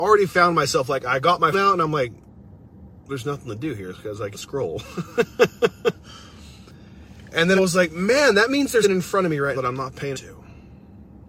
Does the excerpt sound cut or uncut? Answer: cut